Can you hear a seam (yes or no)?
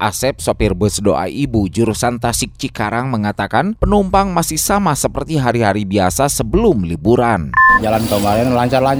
no